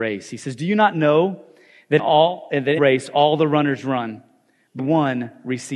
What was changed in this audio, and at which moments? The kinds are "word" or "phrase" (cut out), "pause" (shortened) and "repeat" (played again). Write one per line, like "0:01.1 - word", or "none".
0:02.0 - word
0:02.8 - word
0:04.8 - word